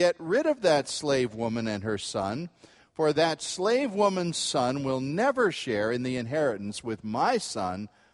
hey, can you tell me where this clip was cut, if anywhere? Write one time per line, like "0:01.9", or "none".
none